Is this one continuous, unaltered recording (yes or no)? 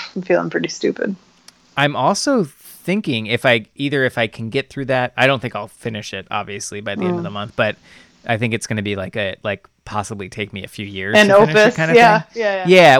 yes